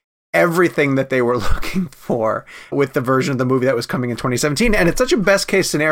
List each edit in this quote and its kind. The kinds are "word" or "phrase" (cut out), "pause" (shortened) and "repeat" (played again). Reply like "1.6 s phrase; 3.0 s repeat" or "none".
2.7 s word

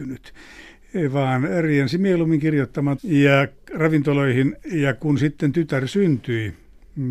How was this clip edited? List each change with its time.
3.0 s phrase

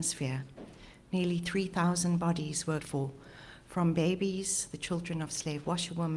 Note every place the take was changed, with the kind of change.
2.8 s word

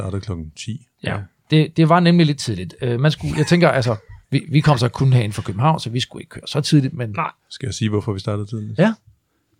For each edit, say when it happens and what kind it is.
4.2 s pause

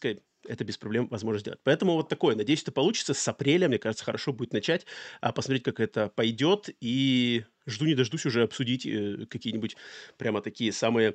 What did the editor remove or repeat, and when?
none

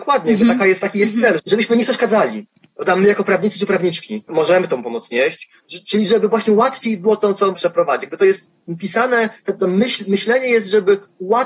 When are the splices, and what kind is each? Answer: 1.4 s word; 4.3 s word; 7.6 s word

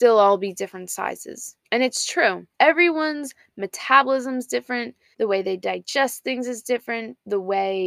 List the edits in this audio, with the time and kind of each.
1.6 s pause; 2.5 s pause; 5.1 s word

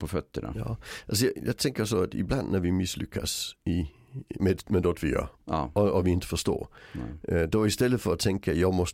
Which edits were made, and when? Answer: 1.4 s word; 4.4 s word

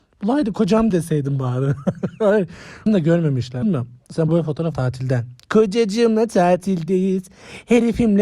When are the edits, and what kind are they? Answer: 0.9 s word; 2.9 s word; 3.6 s word; 4.3 s word; 4.7 s word

